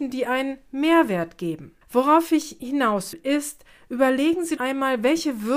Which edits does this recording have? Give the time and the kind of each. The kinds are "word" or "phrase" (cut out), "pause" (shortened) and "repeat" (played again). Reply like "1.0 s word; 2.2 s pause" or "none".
1.8 s pause; 3.1 s word; 4.6 s word